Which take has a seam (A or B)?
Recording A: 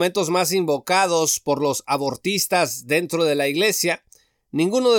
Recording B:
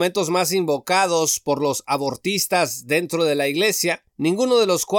B